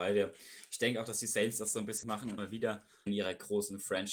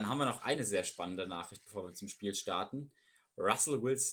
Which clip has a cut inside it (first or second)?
first